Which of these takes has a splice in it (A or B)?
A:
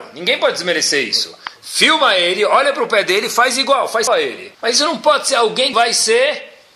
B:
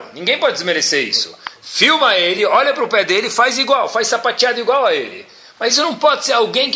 A